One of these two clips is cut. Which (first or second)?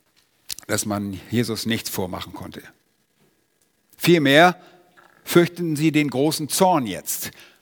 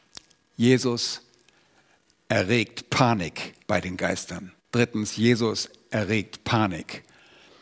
second